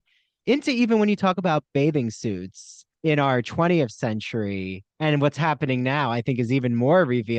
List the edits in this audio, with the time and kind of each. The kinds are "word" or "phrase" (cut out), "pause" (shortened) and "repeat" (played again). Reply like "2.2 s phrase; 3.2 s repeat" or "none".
2.9 s pause; 4.9 s pause